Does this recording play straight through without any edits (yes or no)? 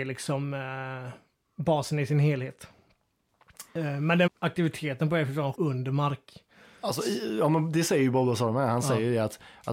no